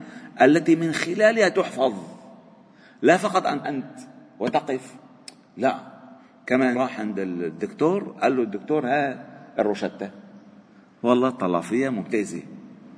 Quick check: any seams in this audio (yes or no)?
yes